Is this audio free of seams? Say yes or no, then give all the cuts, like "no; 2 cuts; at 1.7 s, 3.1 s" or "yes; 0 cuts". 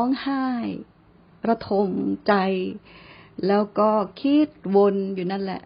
yes; 0 cuts